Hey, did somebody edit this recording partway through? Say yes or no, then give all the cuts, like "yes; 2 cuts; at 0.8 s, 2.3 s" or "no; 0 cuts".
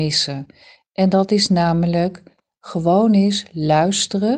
no; 0 cuts